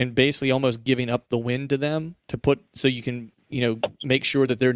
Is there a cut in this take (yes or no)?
no